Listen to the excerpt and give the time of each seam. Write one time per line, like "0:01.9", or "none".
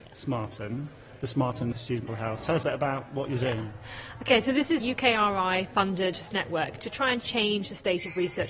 0:01.7
0:02.1
0:02.6
0:04.8
0:06.3